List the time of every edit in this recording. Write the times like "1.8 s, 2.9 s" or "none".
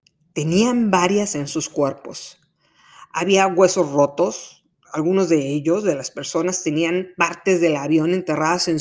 1.3 s